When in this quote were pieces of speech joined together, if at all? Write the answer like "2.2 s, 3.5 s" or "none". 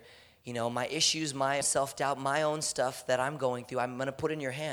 1.6 s